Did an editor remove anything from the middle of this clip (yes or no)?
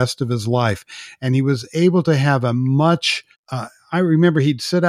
yes